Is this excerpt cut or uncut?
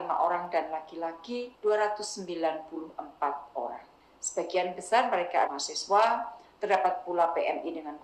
cut